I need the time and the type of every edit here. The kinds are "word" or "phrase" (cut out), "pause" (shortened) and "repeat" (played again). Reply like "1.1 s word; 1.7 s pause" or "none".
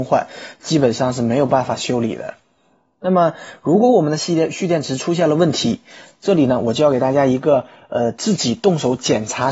none